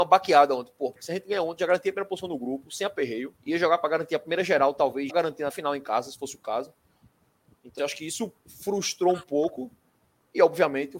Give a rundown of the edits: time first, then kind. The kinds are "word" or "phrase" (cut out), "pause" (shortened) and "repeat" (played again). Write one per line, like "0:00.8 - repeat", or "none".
0:03.4 - pause
0:03.8 - phrase
0:05.1 - word
0:05.5 - phrase
0:07.8 - word
0:08.4 - pause